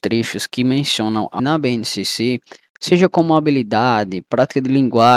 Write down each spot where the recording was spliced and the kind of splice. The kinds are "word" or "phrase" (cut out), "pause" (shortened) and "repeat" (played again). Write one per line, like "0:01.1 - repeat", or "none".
0:01.4 - word